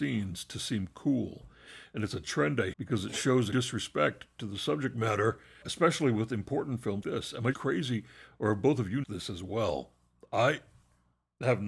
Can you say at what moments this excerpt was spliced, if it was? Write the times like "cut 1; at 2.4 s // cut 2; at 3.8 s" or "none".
cut 1; at 2.7 s // cut 2; at 3.5 s // cut 3; at 5.6 s // cut 4; at 7.0 s // cut 5; at 7.5 s // cut 6; at 9.0 s